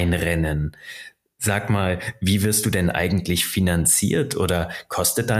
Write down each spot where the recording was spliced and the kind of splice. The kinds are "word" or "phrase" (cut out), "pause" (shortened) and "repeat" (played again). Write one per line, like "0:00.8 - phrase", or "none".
none